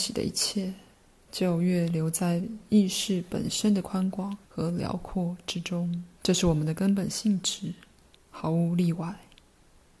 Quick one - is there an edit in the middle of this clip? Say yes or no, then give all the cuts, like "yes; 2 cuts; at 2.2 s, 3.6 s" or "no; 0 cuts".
yes; 3 cuts; at 4.4 s, 6.1 s, 8.1 s